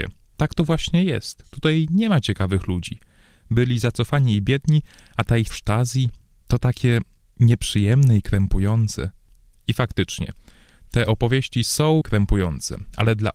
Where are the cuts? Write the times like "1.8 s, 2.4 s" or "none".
5.5 s, 12.0 s